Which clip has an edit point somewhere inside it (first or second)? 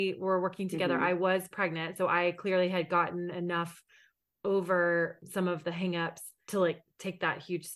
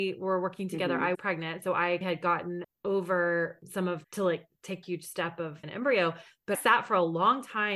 second